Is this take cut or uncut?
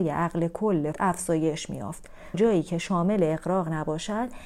cut